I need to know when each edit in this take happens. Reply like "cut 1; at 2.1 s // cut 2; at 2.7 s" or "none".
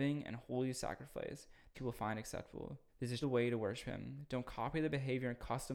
cut 1; at 1.7 s // cut 2; at 2.9 s // cut 3; at 3.2 s